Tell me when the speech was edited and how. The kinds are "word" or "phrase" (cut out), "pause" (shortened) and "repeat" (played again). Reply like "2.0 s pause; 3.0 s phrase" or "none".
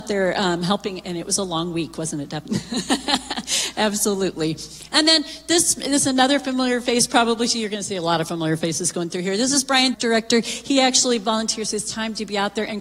9.9 s phrase